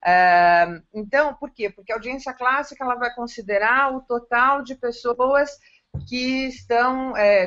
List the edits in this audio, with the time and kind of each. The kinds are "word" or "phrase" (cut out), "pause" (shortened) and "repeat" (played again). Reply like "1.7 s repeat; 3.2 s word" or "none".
none

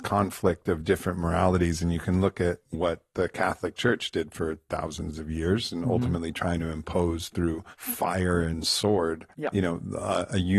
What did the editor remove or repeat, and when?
2.7 s word; 7.7 s pause; 9.3 s pause

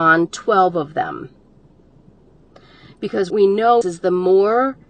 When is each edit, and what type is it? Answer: 3.3 s word; 3.8 s word

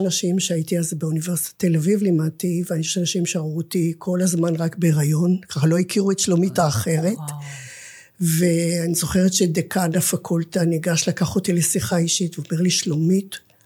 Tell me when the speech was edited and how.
none

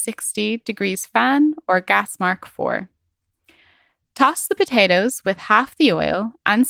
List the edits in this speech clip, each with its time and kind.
none

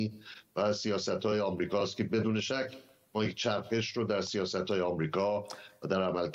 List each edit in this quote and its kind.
none

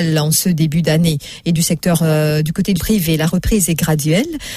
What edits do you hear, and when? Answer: 2.8 s word

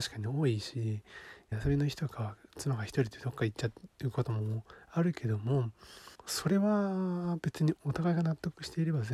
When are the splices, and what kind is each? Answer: 1.5 s phrase; 6.1 s pause

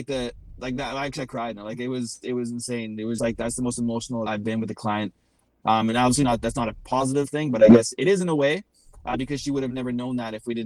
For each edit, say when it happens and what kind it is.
3.2 s word; 4.3 s word

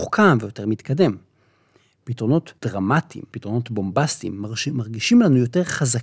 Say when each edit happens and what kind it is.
none

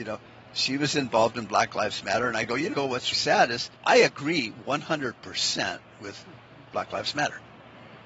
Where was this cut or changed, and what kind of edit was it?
2.7 s word; 3.1 s word; 3.8 s pause

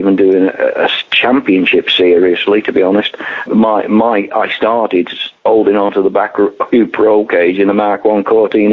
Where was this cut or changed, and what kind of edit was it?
3.5 s word

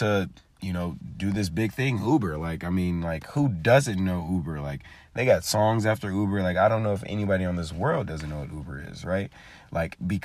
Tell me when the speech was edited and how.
none

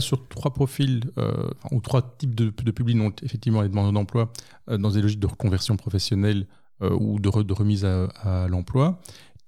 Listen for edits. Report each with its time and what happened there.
none

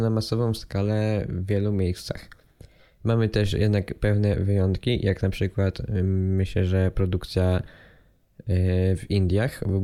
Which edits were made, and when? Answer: none

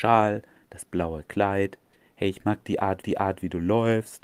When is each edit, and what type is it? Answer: 1.9 s pause; 3.0 s repeat

